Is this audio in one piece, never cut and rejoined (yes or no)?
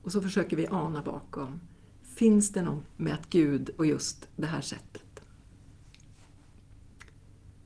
no